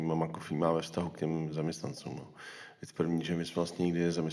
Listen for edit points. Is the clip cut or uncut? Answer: uncut